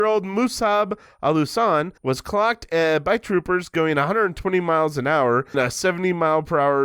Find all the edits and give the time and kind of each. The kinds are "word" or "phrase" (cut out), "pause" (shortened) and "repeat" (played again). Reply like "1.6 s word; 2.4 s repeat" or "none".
2.0 s pause; 5.5 s word